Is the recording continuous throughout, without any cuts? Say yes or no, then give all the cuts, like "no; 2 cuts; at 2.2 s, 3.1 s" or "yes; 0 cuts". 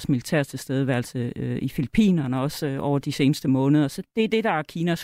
no; 1 cut; at 4.0 s